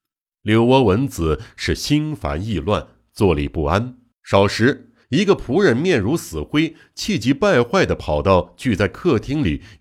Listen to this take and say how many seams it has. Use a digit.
2